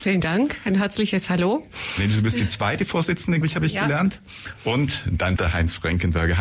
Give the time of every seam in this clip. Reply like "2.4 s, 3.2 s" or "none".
3.4 s, 5.4 s